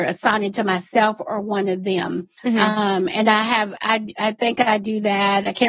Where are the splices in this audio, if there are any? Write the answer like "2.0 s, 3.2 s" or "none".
2.4 s